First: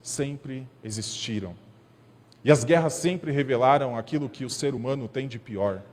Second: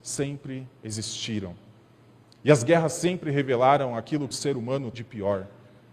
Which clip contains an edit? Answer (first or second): second